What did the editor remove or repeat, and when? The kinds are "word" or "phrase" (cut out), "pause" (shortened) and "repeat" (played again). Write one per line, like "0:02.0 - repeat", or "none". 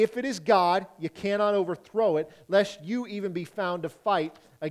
none